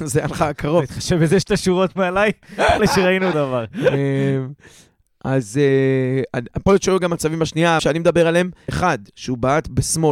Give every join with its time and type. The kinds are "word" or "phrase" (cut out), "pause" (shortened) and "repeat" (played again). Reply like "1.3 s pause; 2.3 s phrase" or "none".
1.4 s word; 2.8 s word; 3.3 s word; 6.7 s word; 7.8 s word; 8.7 s word